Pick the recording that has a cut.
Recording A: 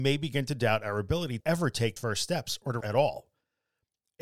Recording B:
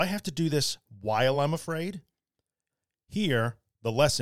A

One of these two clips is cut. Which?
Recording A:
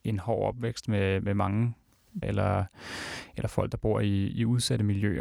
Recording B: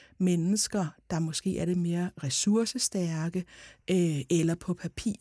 A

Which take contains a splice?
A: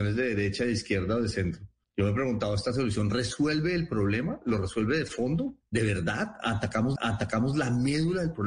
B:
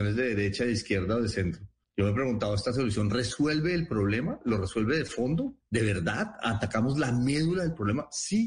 A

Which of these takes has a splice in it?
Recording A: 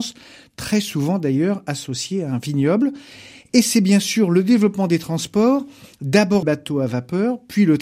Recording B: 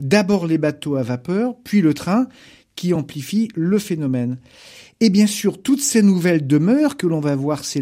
A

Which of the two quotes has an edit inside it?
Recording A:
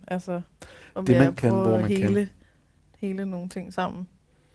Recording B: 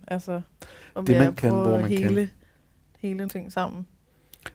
B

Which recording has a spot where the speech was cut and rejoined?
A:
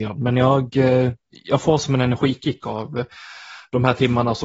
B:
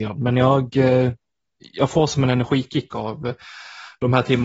A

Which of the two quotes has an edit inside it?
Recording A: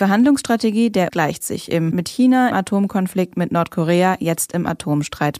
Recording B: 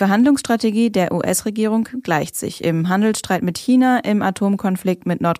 A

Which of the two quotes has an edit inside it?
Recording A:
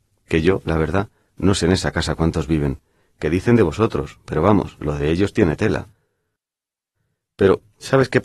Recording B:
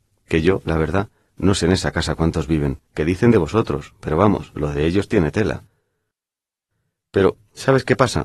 B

